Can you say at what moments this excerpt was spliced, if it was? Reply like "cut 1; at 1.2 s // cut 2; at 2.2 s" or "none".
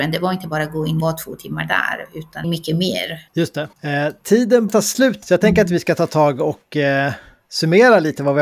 cut 1; at 1.0 s // cut 2; at 2.4 s // cut 3; at 3.3 s // cut 4; at 3.7 s // cut 5; at 4.7 s // cut 6; at 5.2 s